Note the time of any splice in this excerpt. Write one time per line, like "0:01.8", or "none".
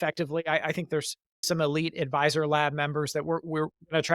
0:01.4